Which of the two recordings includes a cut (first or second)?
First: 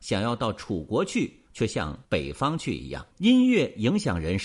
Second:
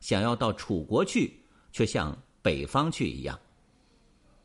first